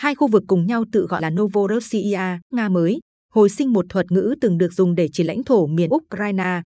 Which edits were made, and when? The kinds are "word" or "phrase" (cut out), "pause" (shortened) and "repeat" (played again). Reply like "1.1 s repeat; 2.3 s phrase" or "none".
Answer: 1.2 s word; 2.5 s word; 5.9 s word